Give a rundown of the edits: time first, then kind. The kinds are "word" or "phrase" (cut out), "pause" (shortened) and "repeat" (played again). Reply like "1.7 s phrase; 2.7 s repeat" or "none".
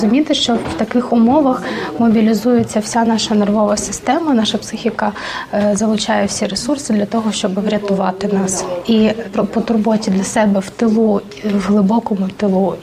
9.2 s word